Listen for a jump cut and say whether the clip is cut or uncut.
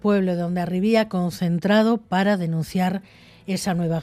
uncut